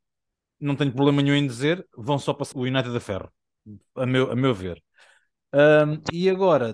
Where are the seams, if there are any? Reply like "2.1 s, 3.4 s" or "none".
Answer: 2.5 s